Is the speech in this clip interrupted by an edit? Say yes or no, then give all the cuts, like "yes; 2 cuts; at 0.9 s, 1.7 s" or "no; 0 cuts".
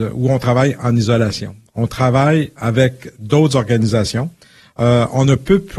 no; 0 cuts